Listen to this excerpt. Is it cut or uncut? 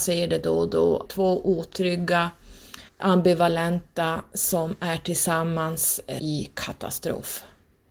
cut